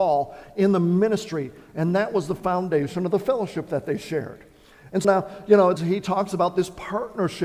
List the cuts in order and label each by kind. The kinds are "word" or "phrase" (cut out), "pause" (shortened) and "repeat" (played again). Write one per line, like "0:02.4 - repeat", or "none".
0:05.0 - word
0:05.8 - word

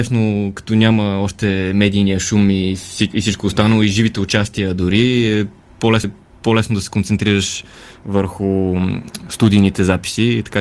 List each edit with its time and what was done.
0:06.0 - repeat

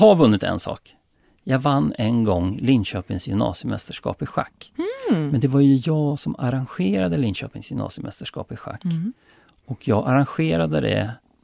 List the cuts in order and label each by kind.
none

